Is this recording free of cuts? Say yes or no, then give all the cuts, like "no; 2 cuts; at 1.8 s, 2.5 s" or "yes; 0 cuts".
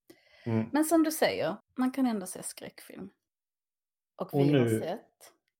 no; 1 cut; at 1.6 s